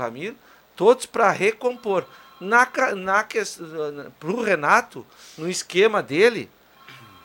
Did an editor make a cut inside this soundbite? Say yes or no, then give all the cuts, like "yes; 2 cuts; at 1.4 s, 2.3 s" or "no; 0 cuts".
no; 0 cuts